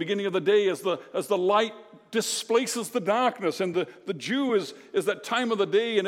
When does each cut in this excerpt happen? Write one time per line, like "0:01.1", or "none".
none